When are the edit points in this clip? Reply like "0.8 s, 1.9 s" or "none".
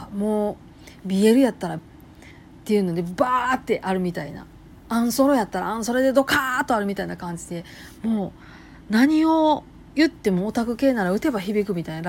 1.8 s